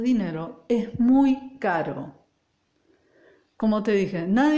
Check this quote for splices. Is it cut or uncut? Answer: uncut